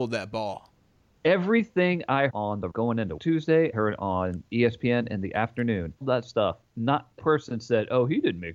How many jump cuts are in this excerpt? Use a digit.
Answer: 6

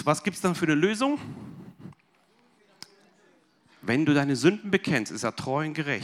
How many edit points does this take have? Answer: 0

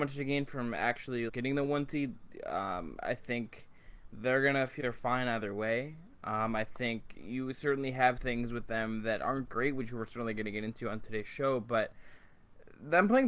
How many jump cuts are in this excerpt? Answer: 3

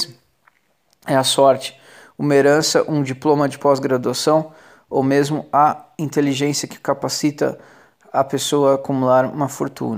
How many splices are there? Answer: 0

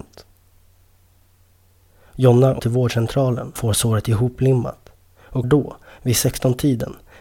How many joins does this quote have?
3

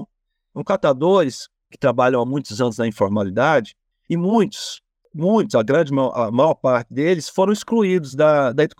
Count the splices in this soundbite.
0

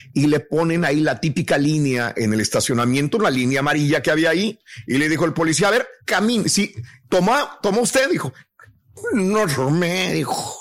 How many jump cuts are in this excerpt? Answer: 1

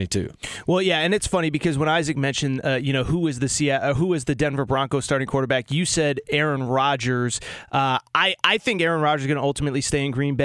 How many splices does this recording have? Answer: 0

